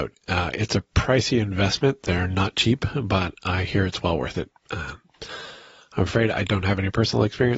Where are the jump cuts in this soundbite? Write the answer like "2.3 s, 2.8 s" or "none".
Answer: none